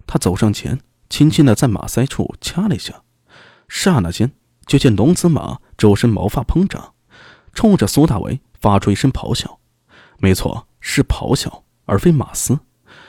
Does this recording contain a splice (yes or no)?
no